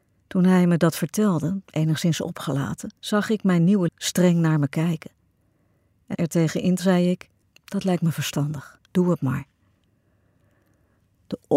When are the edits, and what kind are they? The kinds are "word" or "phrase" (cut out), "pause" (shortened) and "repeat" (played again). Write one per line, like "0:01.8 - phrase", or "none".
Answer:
0:01.6 - pause
0:03.0 - pause
0:03.9 - word
0:06.1 - phrase
0:06.8 - word
0:07.4 - pause
0:08.9 - pause